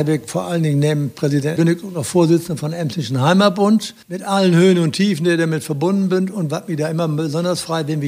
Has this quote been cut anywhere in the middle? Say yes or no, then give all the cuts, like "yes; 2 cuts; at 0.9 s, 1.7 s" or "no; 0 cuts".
yes; 2 cuts; at 1.6 s, 4.0 s